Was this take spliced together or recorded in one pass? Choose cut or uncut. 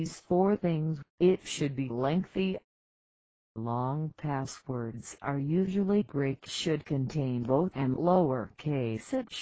cut